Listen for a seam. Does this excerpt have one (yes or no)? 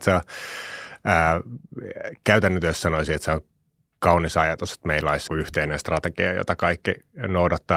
yes